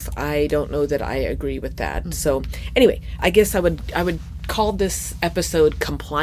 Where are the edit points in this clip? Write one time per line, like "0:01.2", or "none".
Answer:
0:03.2